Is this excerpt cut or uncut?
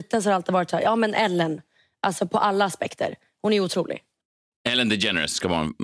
uncut